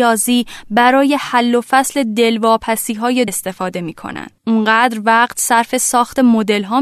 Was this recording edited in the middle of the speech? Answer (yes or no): yes